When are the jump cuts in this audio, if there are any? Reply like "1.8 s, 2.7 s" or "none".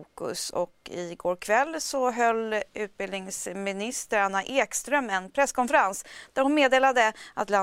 none